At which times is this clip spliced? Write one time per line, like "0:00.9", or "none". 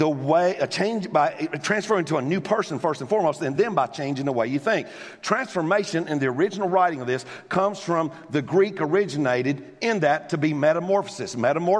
none